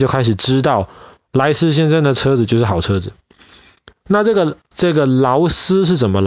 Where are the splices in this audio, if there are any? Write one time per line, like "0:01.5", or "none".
0:04.7